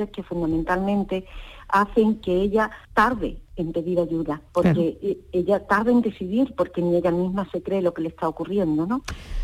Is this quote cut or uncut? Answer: cut